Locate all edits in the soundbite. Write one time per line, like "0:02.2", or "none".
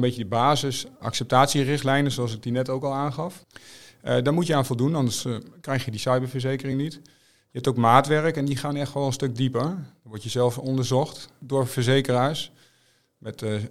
none